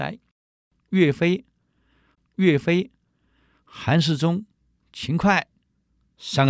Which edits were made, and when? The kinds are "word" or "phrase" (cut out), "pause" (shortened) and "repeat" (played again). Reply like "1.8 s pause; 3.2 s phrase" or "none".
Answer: 2.1 s repeat